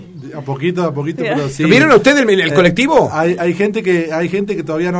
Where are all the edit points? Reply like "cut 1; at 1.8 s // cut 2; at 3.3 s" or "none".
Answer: none